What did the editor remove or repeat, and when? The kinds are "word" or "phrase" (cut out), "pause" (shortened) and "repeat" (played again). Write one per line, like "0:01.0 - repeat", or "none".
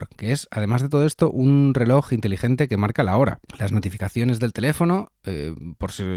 none